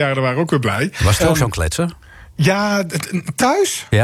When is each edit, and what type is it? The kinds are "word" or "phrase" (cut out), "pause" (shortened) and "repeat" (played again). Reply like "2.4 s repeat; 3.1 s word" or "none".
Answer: 1.2 s word